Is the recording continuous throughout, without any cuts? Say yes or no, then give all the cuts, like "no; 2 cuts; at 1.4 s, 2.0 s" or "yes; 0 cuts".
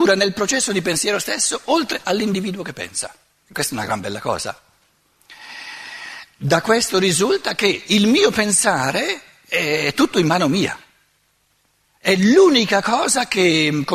yes; 0 cuts